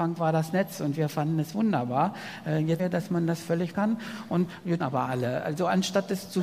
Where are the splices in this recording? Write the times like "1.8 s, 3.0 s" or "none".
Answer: 2.8 s, 3.7 s, 4.8 s